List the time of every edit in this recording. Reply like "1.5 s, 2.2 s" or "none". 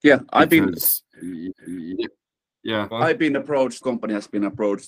1.5 s, 2.9 s, 3.8 s